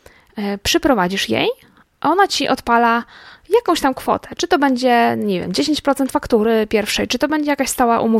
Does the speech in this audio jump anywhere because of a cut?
no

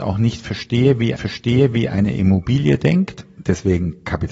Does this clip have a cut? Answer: yes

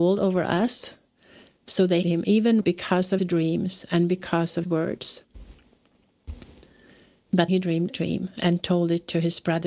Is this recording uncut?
no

